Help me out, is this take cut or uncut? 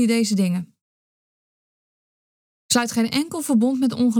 uncut